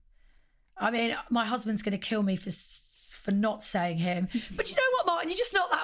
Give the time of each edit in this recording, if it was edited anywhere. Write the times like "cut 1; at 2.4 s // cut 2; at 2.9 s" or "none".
none